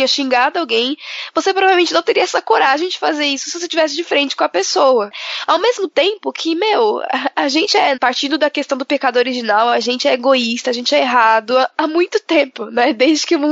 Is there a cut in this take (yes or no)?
no